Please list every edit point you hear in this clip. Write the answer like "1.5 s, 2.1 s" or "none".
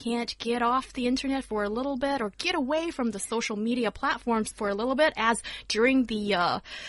2.3 s, 4.5 s